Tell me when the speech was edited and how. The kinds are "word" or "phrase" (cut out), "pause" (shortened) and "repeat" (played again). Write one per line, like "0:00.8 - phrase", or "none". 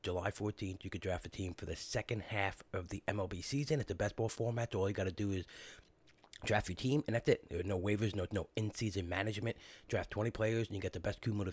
0:08.3 - word